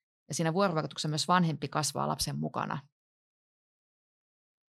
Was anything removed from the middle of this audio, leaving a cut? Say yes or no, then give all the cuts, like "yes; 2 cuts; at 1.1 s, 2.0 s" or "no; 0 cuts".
no; 0 cuts